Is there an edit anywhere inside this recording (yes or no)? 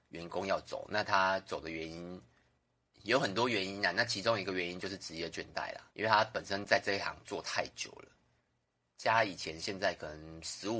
yes